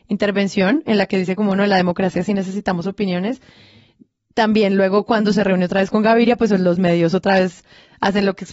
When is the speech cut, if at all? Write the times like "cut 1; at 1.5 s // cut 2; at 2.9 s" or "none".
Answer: none